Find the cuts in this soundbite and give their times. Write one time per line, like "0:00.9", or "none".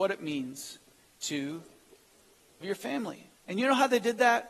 0:02.6
0:03.4